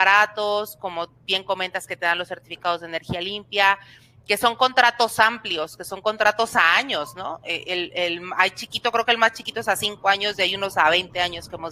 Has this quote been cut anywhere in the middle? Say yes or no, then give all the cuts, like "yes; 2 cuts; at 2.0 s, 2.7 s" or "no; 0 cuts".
no; 0 cuts